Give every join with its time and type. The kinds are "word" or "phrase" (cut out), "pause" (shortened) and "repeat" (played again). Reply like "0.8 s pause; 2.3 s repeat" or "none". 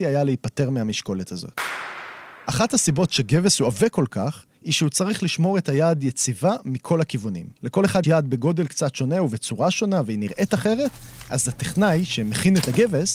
4.5 s pause; 7.6 s pause; 8.0 s word